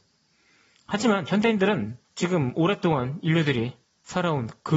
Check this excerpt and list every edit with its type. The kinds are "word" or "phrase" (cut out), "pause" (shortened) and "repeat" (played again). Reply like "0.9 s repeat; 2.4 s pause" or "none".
2.0 s pause